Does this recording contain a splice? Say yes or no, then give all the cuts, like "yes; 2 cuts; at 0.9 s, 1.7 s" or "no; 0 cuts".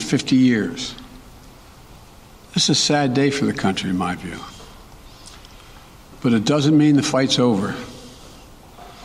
no; 0 cuts